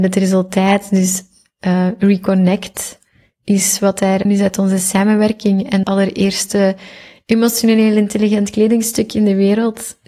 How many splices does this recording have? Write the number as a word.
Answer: two